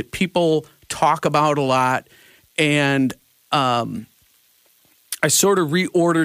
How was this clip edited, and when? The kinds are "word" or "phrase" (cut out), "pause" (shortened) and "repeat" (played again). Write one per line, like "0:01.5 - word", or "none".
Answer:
none